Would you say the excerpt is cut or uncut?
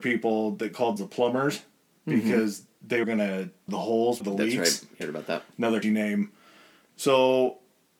cut